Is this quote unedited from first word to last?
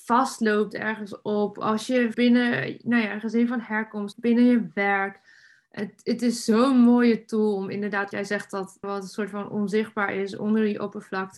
no; 4 cuts; at 2.1 s, 4.1 s, 8.1 s, 8.8 s

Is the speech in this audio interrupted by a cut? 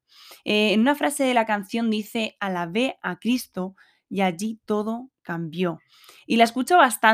no; 0 cuts

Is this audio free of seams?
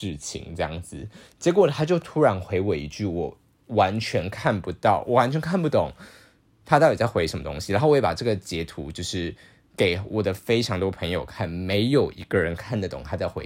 yes; 0 cuts

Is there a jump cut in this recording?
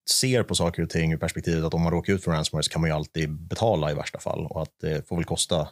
no; 0 cuts

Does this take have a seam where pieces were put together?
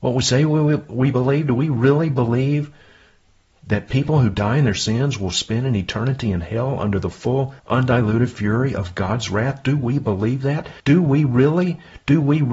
yes; 2 cuts; at 7.6 s, 10.8 s

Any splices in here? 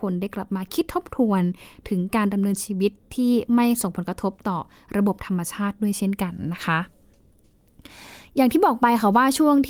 no; 0 cuts

